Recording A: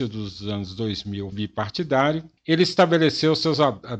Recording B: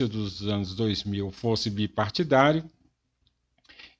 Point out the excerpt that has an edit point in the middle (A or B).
A